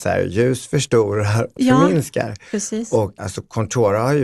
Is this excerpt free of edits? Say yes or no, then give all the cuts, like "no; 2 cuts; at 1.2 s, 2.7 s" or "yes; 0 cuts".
no; 2 cuts; at 1.6 s, 3.2 s